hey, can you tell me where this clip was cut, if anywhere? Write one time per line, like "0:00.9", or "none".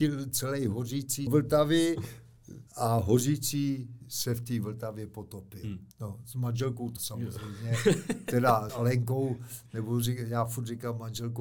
0:01.3
0:02.7
0:05.9
0:07.0
0:08.7